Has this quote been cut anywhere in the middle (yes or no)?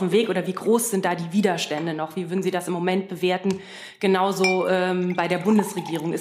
no